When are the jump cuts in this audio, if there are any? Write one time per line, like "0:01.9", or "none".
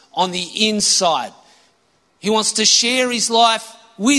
none

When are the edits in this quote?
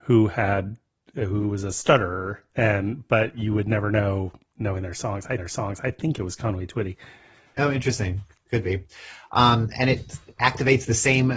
0:05.4

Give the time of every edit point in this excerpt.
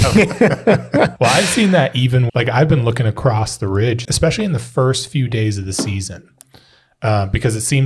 0:01.2
0:02.3
0:04.0

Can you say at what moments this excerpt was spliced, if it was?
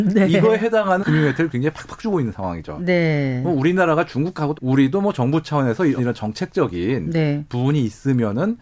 0:01.0
0:04.5
0:06.0

